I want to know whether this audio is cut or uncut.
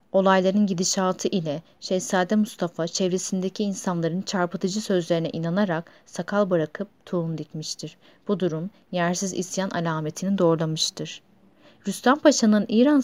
uncut